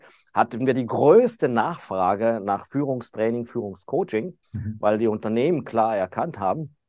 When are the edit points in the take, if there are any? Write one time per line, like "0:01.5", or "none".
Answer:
0:04.4